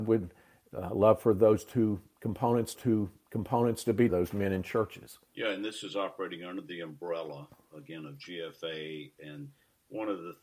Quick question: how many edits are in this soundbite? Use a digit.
3